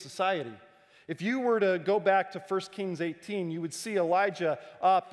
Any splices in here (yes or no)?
no